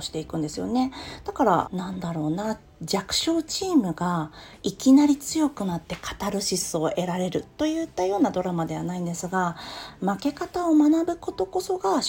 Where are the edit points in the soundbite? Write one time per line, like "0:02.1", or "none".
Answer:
0:01.6